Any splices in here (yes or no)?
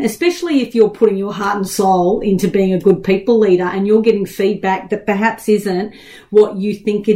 no